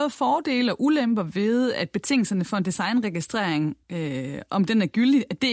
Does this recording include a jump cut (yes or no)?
yes